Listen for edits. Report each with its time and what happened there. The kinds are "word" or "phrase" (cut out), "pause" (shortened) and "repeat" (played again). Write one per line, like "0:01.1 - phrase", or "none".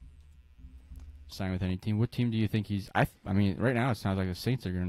0:01.3 - phrase